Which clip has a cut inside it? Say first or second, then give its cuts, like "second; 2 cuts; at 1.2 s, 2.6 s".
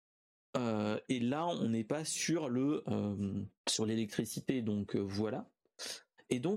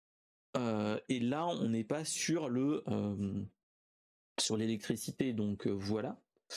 first; 1 cut; at 3.6 s